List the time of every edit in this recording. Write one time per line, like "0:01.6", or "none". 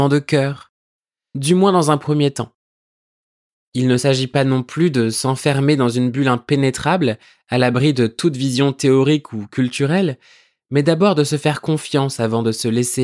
none